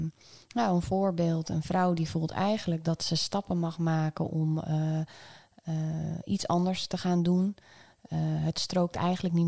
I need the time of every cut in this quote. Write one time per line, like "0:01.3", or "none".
none